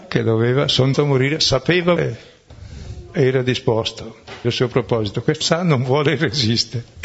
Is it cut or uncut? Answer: cut